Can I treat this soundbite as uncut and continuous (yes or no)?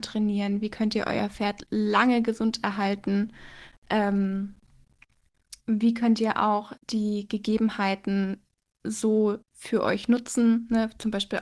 no